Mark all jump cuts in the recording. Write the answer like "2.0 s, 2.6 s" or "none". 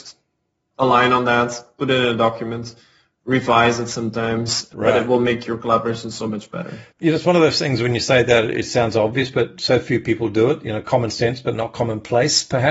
6.9 s